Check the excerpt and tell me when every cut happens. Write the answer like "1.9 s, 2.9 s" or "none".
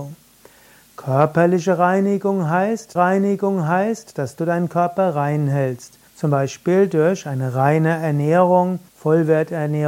3.0 s, 6.1 s, 8.9 s